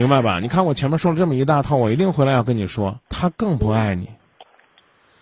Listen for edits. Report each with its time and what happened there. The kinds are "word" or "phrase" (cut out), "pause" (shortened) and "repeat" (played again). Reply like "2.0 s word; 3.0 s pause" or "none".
3.1 s pause